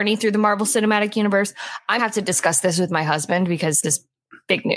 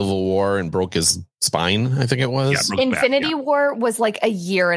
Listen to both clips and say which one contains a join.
first; 2 cuts; at 2.0 s, 3.8 s

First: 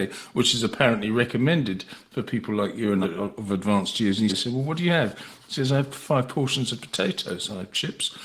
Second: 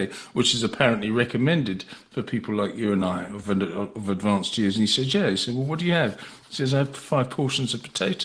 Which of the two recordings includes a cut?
first; 2 cuts; at 3.0 s, 4.3 s

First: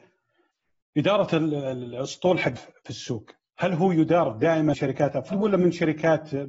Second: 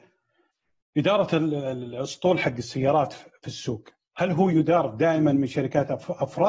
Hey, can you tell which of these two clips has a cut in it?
first; 3 cuts; at 2.6 s, 4.7 s, 5.3 s

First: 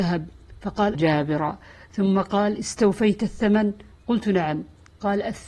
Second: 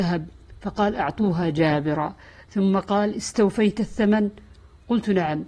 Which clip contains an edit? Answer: first; 2 cuts; at 0.9 s, 3.9 s

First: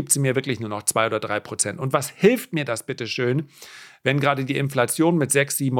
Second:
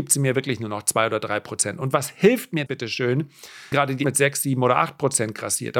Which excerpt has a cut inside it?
second; 3 cuts; at 2.7 s, 3.7 s, 4.0 s

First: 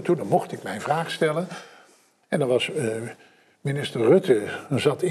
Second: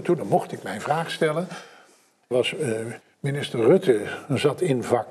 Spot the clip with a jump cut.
second; 2 cuts; at 2.3 s, 3.0 s

